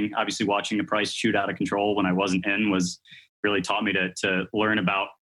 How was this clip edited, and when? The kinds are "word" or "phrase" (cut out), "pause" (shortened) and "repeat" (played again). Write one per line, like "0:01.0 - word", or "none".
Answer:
none

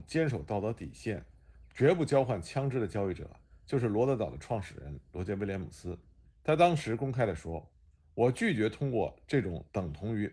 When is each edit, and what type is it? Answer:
0:06.3 - pause

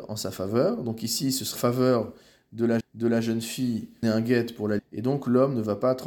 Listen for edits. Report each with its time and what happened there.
0:01.6 - word
0:02.8 - repeat
0:04.0 - phrase
0:04.8 - word

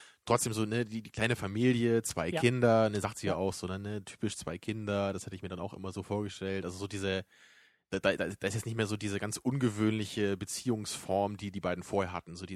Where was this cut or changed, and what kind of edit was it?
none

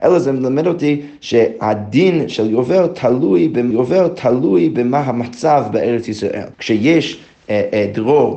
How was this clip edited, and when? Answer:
0:03.7 - repeat
0:06.5 - pause

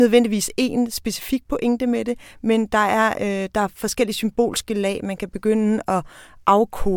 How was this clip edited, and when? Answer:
none

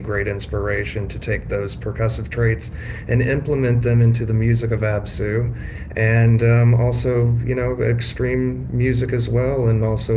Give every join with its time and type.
none

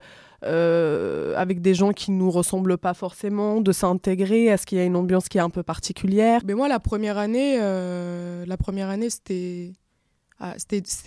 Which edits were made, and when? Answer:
none

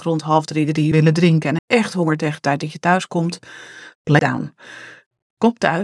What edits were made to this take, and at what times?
0:00.9 - word
0:01.6 - word
0:04.2 - word

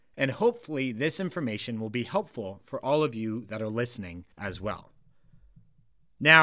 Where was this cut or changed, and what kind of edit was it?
0:04.3 - pause

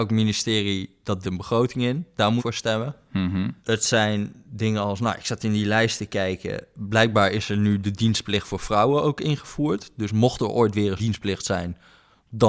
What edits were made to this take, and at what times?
0:01.2 - word
0:02.4 - word
0:03.6 - pause
0:11.0 - word

